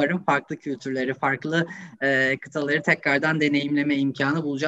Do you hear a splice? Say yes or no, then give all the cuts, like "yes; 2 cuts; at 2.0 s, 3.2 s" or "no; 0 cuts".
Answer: no; 0 cuts